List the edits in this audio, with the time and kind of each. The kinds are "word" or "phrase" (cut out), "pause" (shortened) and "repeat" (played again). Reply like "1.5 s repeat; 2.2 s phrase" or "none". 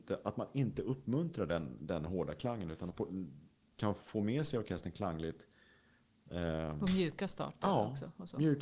2.9 s word